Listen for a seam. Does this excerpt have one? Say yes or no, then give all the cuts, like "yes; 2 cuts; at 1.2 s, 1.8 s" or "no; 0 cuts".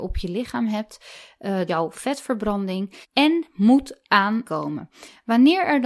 yes; 3 cuts; at 1.7 s, 3.0 s, 4.4 s